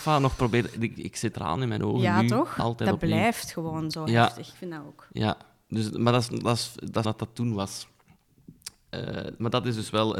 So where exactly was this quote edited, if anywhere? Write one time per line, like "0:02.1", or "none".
0:01.0
0:01.3
0:07.0

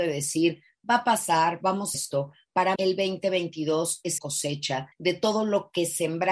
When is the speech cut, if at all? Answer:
0:01.9
0:02.8
0:04.2
0:04.9

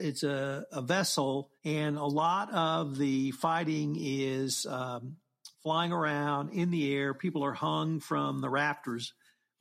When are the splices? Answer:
0:01.6
0:05.5

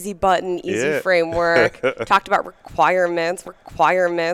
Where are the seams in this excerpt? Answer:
0:03.4

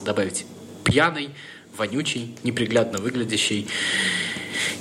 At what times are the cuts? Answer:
none

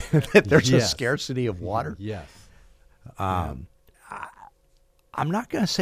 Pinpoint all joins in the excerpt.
0:03.9

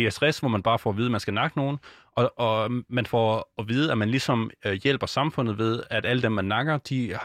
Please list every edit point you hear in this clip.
none

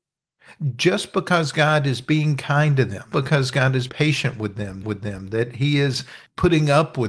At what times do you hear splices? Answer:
0:03.1
0:03.9
0:04.8

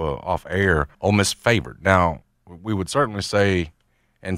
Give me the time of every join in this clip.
0:00.9

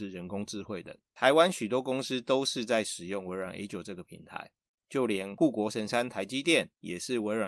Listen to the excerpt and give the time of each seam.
0:01.0

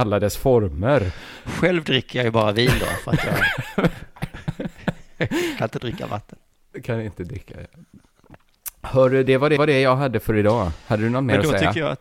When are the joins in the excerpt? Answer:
0:09.6

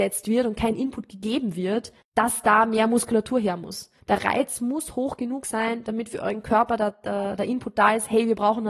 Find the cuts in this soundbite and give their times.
0:02.0
0:04.0

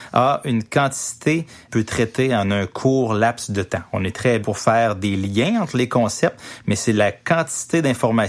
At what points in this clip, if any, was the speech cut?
0:01.7
0:04.4

